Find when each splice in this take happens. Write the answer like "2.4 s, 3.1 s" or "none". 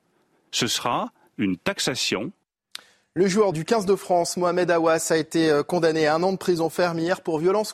3.5 s